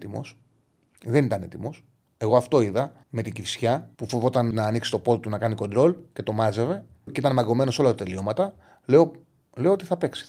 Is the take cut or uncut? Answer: cut